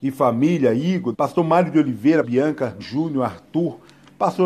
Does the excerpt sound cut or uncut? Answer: cut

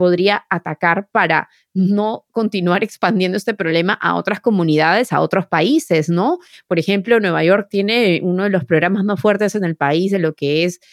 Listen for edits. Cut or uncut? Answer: uncut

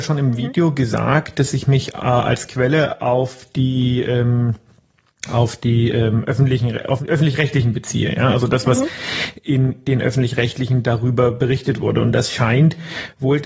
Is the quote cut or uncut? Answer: uncut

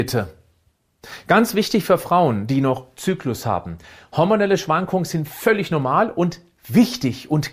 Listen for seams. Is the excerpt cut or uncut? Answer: uncut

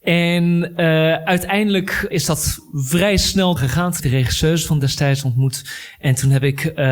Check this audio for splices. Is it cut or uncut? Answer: cut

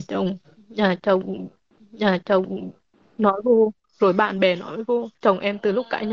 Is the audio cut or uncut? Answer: cut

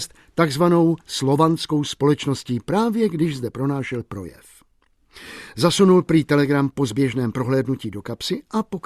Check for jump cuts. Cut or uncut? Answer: cut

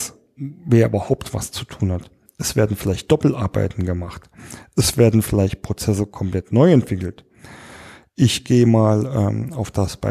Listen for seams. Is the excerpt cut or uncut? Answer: uncut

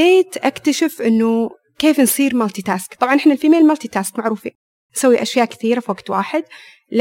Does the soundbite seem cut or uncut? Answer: uncut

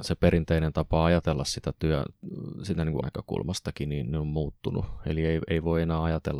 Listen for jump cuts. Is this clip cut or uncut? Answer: cut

